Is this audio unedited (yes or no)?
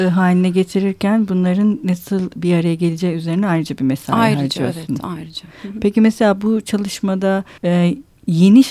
no